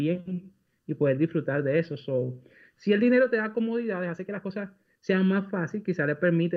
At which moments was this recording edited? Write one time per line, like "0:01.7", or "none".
none